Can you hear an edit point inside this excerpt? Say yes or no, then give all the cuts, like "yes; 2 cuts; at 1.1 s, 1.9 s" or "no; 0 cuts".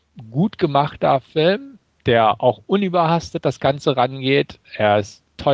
no; 0 cuts